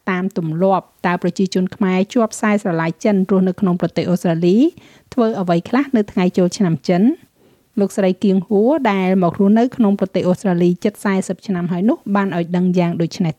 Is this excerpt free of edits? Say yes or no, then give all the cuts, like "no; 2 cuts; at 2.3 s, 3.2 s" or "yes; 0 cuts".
yes; 0 cuts